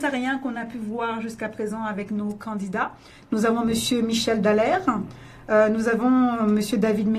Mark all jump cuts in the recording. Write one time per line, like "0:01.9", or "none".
none